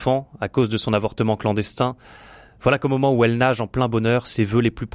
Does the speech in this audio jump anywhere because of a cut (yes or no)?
no